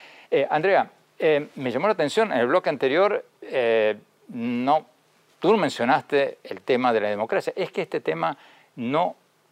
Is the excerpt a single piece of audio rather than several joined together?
yes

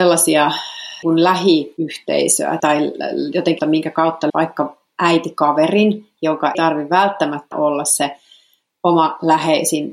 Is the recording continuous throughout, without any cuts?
no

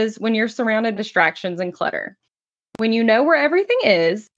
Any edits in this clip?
yes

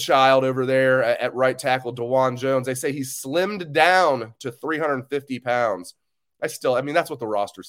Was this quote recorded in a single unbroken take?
yes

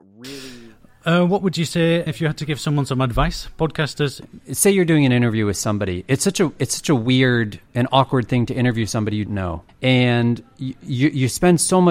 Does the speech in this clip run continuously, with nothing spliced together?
no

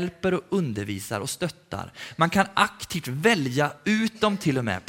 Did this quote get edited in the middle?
no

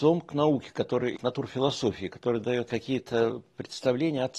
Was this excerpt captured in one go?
no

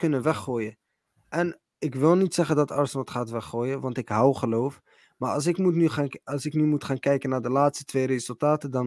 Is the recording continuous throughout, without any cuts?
yes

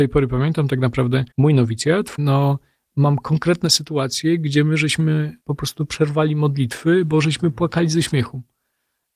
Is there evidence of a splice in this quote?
yes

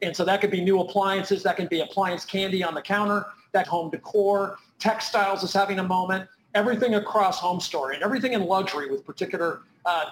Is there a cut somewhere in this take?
yes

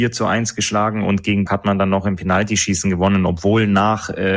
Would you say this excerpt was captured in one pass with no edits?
no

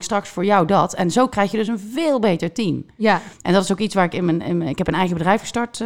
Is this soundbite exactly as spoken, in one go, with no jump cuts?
no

